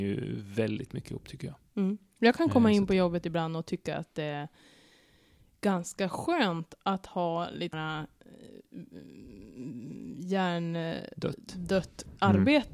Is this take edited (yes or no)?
yes